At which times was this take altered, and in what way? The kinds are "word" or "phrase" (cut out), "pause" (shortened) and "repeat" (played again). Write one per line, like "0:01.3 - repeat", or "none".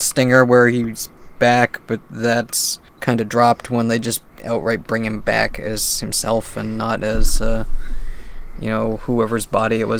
0:02.9 - pause
0:04.3 - pause